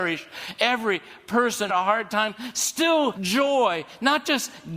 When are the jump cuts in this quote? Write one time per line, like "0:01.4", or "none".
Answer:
0:01.7
0:03.1